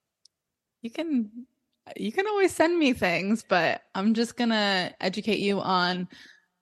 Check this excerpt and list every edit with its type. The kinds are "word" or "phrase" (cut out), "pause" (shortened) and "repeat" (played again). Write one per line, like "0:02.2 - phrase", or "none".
0:03.9 - pause